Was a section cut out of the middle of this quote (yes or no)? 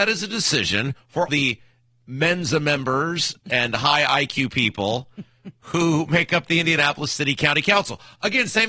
yes